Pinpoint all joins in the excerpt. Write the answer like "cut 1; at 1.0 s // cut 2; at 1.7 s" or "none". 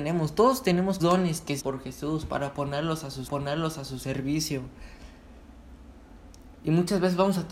cut 1; at 1.0 s // cut 2; at 1.6 s // cut 3; at 3.3 s